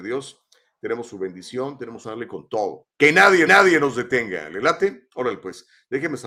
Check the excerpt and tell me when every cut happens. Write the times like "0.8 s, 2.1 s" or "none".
2.0 s, 2.9 s, 3.5 s